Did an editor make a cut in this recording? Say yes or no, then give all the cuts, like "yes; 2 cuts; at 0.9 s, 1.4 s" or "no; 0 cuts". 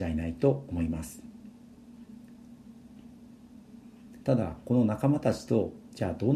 yes; 1 cut; at 4.2 s